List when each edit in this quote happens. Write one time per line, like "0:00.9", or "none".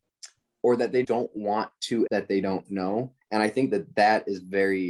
0:01.0
0:02.1
0:03.2